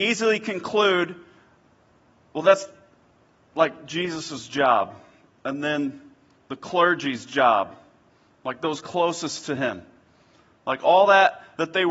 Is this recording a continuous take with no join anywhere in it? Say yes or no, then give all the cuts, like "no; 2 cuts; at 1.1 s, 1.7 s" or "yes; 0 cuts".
yes; 0 cuts